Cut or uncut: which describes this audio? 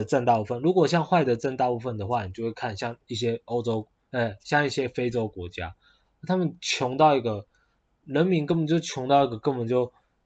uncut